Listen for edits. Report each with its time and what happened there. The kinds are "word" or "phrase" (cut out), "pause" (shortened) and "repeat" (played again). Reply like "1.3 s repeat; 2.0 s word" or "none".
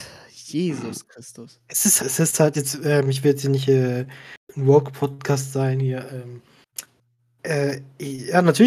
2.0 s word; 2.5 s word; 4.4 s pause